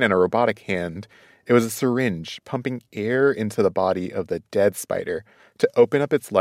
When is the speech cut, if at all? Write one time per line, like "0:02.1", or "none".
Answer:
none